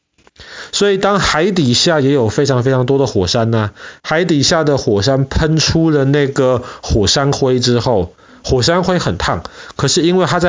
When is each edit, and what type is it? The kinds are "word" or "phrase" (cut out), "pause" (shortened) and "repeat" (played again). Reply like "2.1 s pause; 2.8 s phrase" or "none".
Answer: none

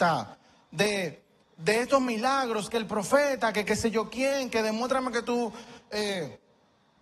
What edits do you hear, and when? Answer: none

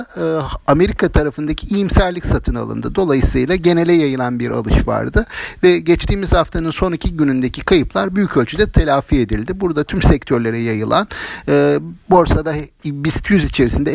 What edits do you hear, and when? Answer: 12.0 s pause

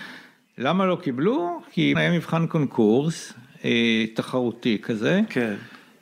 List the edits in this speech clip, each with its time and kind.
1.9 s word

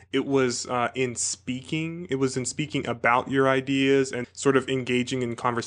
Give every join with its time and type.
4.2 s word

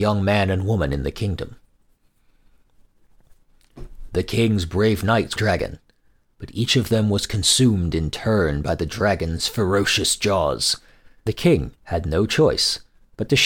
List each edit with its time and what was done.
5.4 s phrase; 11.3 s word; 11.8 s pause

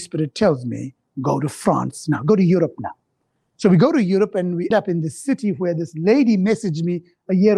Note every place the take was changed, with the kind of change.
4.7 s word

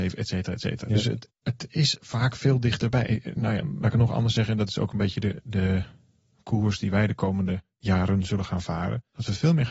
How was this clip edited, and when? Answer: none

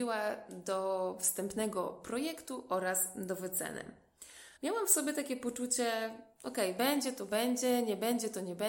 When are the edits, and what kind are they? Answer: 4.6 s pause

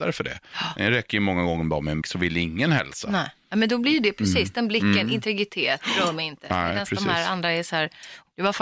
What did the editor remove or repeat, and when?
2.0 s word

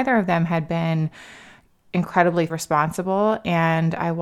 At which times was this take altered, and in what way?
2.5 s word

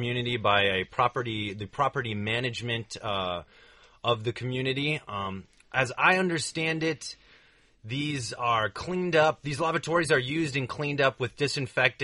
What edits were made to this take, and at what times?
none

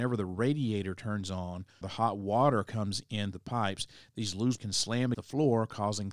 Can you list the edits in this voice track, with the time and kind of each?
1.8 s word; 3.3 s word; 4.6 s word; 5.1 s word

